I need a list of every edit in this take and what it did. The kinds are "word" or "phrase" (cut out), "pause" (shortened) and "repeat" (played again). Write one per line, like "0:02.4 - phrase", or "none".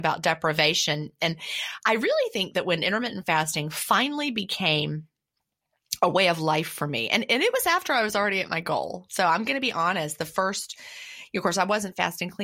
none

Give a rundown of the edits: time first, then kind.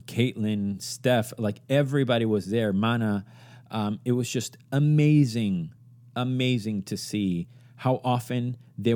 none

